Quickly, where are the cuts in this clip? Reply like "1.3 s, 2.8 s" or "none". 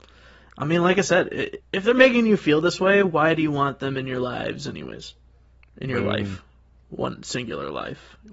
1.6 s